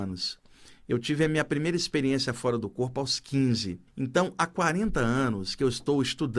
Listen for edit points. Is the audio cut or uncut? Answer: cut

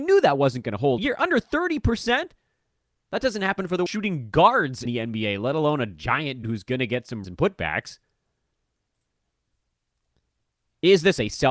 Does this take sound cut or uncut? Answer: cut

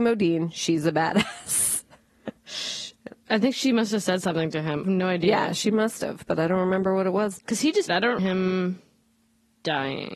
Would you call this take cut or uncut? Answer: cut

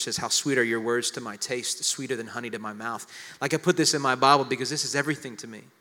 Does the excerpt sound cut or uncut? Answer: uncut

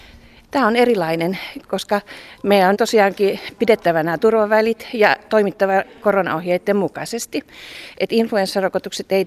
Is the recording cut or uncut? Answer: cut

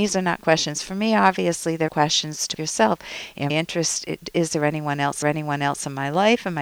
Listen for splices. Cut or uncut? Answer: cut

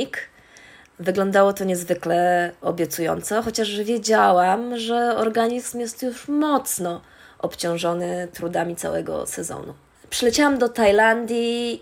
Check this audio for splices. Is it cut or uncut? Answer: uncut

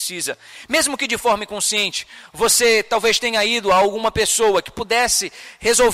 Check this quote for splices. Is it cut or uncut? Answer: uncut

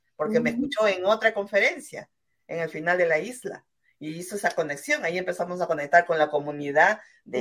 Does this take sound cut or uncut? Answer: uncut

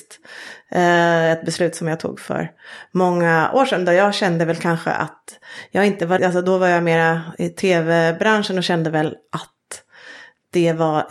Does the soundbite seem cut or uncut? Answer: cut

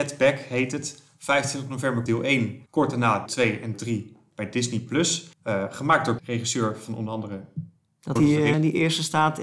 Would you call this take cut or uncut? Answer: cut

